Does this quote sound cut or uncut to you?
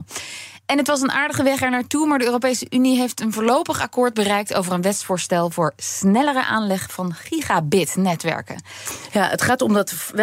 uncut